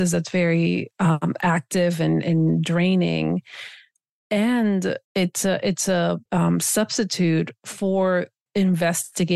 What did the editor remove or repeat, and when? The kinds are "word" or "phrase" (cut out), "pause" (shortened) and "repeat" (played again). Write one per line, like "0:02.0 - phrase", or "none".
0:05.0 - pause
0:06.3 - pause
0:08.5 - pause